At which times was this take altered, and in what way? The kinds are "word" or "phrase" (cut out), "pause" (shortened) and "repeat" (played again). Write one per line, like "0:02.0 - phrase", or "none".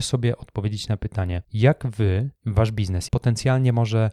0:01.4 - pause
0:02.4 - pause
0:03.1 - phrase